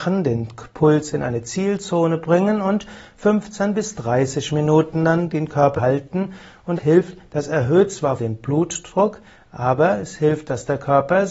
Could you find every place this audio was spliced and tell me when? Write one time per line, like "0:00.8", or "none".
0:05.8
0:06.8
0:08.2